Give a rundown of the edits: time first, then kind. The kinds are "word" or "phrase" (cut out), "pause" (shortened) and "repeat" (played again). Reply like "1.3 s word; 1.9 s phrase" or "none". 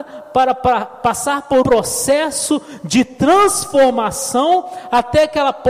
1.6 s word